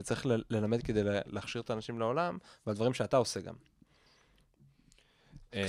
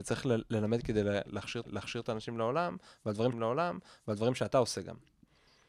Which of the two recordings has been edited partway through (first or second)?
second